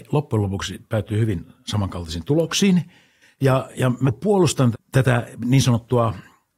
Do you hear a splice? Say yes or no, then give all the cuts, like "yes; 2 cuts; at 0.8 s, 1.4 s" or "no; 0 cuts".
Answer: yes; 3 cuts; at 3.7 s, 4.0 s, 4.7 s